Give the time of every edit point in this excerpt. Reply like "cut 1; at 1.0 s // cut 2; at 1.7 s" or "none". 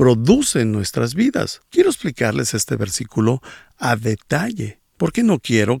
cut 1; at 1.7 s // cut 2; at 4.9 s

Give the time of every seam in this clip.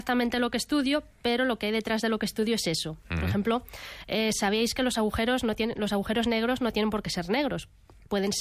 none

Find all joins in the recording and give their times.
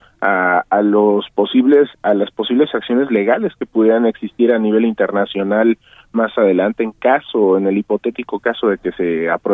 cut 1; at 1.9 s

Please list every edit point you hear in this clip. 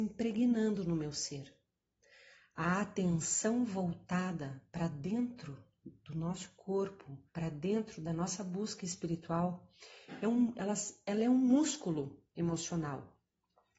cut 1; at 7.3 s

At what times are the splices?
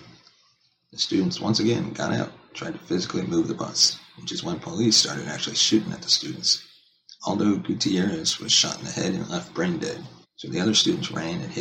cut 1; at 7.2 s // cut 2; at 10.2 s

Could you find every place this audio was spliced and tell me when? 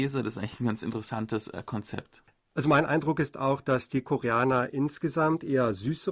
none

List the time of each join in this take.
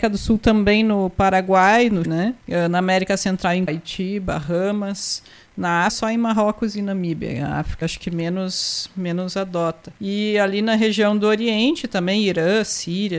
cut 1; at 2.0 s // cut 2; at 2.4 s // cut 3; at 3.7 s // cut 4; at 5.9 s // cut 5; at 7.8 s // cut 6; at 10.0 s

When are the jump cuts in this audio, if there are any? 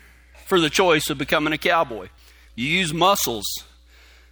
none

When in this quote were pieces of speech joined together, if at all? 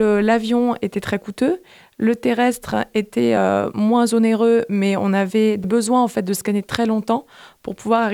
none

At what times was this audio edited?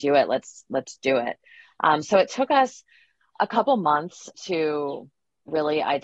none

